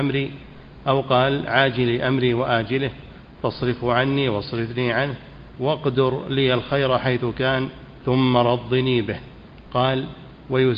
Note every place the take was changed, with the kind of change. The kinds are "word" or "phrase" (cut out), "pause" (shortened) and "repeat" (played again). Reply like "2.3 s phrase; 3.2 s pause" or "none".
none